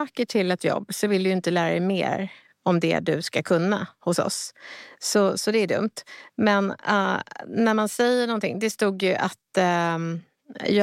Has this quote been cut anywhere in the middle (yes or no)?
no